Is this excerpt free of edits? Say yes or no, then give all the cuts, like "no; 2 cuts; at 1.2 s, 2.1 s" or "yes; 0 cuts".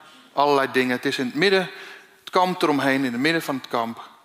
yes; 0 cuts